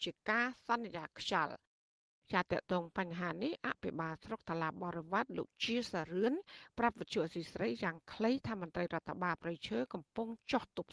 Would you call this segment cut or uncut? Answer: uncut